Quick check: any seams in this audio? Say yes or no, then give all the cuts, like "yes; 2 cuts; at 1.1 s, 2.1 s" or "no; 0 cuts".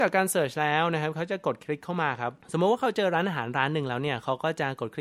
yes; 1 cut; at 2.4 s